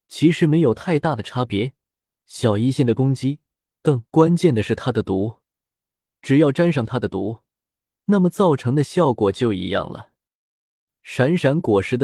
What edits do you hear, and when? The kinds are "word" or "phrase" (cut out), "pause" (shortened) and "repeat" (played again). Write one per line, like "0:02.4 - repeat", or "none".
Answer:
0:04.1 - pause